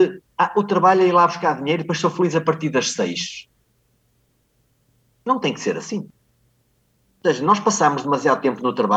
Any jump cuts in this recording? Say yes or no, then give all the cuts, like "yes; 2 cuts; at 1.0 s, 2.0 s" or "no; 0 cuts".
no; 0 cuts